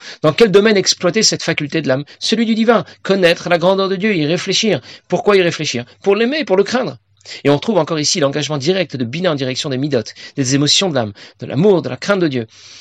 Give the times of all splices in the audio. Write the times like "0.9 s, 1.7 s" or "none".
none